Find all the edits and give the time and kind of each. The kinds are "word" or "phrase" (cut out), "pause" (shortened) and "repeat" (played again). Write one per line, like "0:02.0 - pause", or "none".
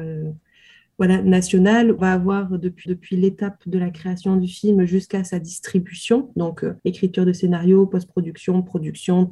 0:02.0 - phrase
0:02.9 - repeat
0:06.8 - pause